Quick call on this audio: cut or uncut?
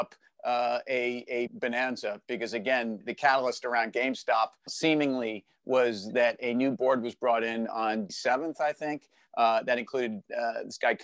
cut